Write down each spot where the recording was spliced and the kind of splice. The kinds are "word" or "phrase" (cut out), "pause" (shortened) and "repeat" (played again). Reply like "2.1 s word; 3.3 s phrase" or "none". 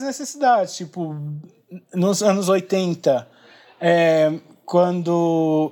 none